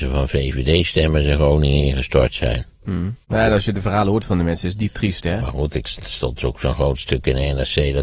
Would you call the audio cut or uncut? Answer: cut